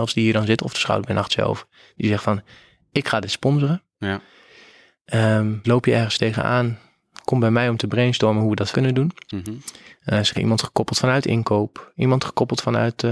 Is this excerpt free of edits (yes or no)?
no